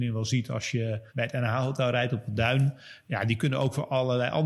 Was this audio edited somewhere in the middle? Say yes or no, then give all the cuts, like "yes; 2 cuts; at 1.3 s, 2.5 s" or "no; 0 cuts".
yes; 1 cut; at 1.1 s